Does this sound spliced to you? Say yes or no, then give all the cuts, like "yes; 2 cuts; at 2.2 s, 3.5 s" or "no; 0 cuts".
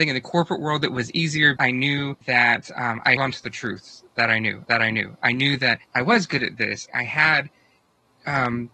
yes; 6 cuts; at 1.6 s, 2.2 s, 3.2 s, 4.6 s, 5.8 s, 6.9 s